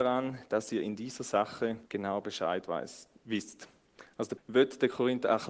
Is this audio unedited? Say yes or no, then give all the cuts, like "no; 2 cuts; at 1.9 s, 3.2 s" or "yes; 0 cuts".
no; 2 cuts; at 1.9 s, 4.4 s